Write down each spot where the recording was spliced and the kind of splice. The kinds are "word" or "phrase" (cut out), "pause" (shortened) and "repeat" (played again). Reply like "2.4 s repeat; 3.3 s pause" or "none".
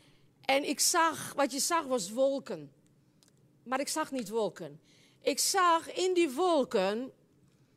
none